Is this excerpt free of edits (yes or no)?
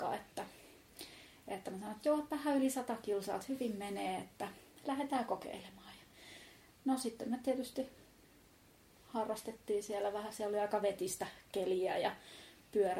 yes